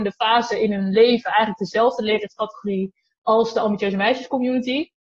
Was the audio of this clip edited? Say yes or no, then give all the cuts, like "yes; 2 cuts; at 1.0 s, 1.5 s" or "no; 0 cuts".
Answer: no; 0 cuts